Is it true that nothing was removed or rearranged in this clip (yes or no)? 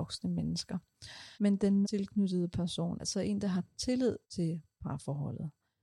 no